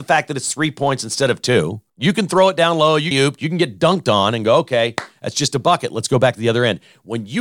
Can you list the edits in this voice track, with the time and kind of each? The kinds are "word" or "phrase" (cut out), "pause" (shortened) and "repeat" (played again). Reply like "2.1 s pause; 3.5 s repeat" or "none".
1.9 s pause; 3.1 s phrase

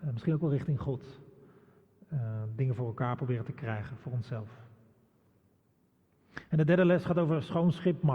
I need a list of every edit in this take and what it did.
none

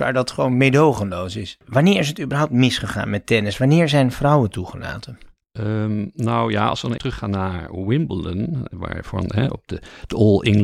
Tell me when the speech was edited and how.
7.0 s word

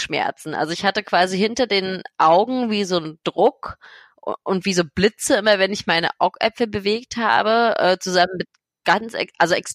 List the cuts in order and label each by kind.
none

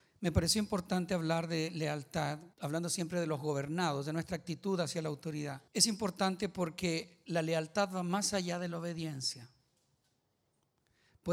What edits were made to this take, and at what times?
2.5 s pause; 5.7 s pause

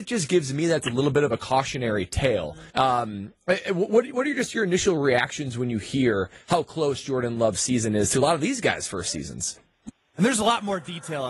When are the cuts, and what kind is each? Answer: 2.7 s pause

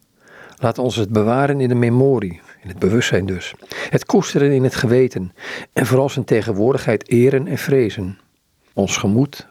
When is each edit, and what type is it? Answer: none

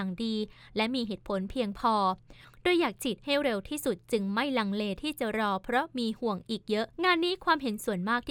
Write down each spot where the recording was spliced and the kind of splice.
6.9 s pause

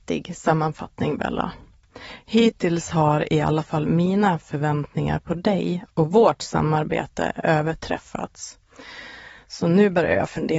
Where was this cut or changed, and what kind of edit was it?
none

